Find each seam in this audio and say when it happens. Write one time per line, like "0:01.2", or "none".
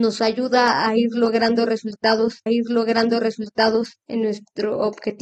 0:02.5